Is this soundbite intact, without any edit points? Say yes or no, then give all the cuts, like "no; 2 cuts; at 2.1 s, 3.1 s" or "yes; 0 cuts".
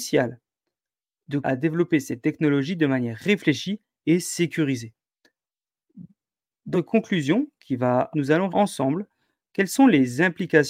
no; 4 cuts; at 1.4 s, 6.7 s, 8.1 s, 8.5 s